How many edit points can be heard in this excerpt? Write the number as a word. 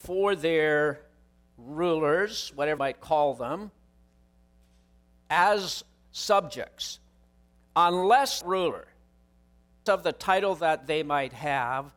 three